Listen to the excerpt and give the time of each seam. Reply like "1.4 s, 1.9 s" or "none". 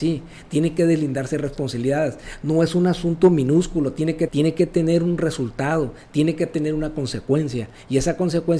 4.3 s